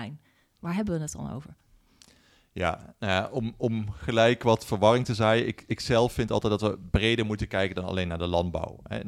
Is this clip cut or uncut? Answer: uncut